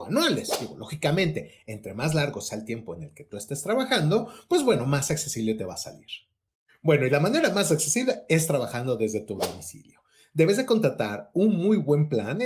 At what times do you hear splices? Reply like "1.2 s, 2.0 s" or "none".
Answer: none